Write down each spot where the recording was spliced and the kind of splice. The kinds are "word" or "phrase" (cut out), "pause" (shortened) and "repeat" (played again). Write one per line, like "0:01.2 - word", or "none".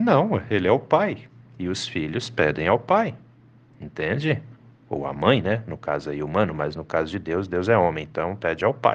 none